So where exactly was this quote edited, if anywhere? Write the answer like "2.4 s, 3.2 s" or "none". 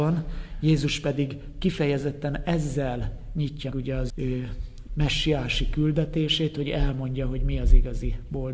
3.7 s, 4.1 s